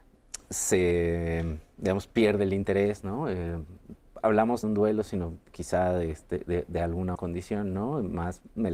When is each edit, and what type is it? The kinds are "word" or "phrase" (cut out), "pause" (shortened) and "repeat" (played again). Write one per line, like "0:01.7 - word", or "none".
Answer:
0:04.6 - phrase
0:07.1 - word